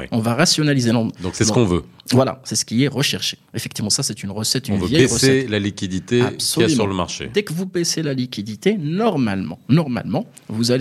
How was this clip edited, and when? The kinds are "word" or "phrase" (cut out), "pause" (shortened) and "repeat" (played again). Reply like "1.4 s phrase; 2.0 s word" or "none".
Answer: none